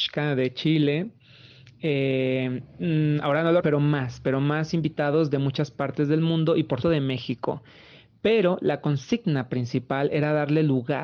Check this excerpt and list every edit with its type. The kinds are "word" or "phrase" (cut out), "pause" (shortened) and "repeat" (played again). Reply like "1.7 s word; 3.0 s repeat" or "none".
3.6 s word; 6.8 s word